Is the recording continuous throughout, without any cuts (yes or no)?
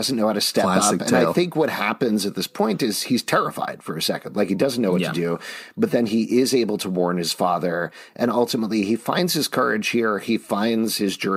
yes